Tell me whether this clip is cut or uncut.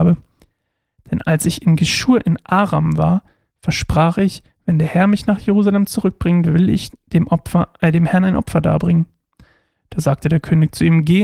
uncut